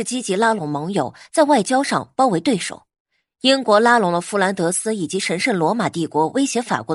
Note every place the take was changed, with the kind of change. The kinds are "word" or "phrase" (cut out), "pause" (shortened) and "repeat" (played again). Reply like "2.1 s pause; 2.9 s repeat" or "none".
none